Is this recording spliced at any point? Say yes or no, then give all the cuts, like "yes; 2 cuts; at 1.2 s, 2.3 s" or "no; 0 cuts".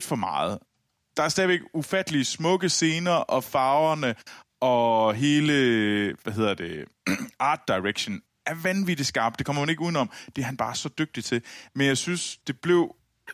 no; 0 cuts